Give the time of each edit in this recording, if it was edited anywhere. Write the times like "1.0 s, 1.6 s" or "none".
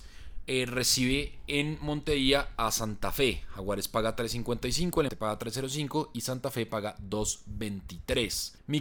5.1 s